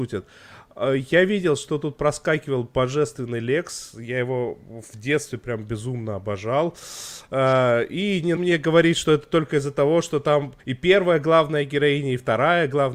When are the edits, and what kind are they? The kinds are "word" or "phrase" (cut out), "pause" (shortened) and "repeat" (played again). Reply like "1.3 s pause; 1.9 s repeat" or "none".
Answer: 8.4 s word; 10.6 s pause